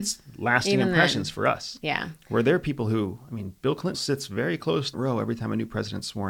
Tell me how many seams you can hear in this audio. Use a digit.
2